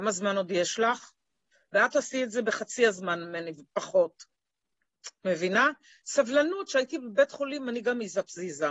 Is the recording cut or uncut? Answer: uncut